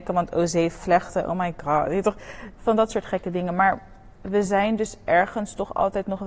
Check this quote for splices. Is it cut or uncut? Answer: uncut